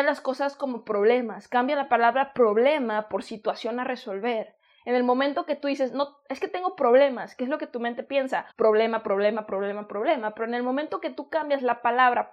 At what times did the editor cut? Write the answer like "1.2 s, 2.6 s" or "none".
8.5 s